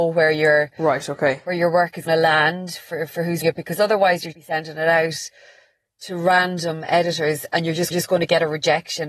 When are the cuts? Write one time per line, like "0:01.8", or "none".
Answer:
0:02.1
0:03.4
0:04.3
0:07.9